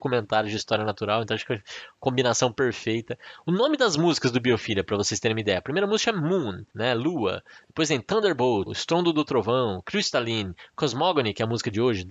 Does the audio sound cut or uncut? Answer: cut